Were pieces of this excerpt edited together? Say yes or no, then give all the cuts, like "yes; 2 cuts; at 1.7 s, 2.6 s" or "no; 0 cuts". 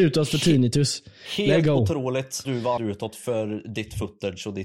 yes; 2 cuts; at 2.4 s, 2.8 s